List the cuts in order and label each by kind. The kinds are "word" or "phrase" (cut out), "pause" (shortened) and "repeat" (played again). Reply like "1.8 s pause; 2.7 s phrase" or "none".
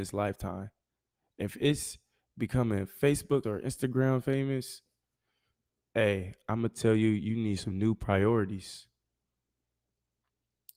3.4 s word